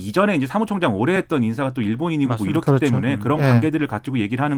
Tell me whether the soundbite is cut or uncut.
uncut